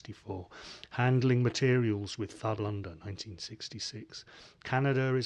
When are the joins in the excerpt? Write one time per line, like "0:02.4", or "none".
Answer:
0:02.6

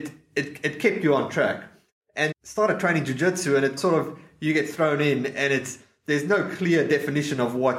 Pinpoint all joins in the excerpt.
0:02.3
0:03.8

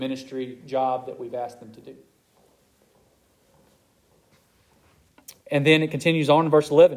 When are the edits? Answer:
0:05.4

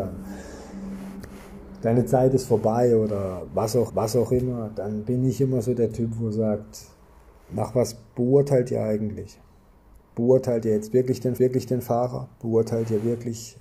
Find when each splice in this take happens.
0:03.9
0:11.4

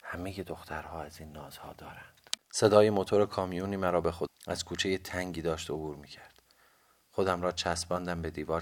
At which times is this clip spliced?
0:02.4
0:04.3

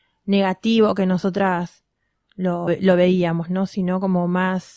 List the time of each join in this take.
0:02.7

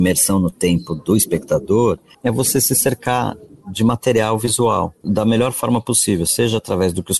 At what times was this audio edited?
none

